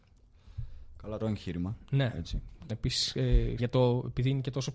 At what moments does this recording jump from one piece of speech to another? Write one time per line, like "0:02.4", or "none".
0:01.2
0:02.7
0:03.6